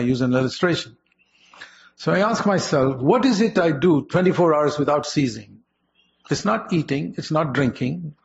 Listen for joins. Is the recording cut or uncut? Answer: uncut